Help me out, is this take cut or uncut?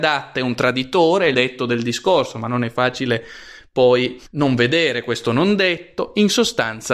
cut